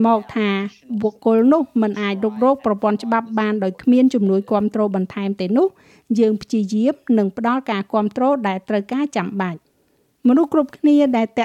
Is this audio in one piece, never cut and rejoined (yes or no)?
yes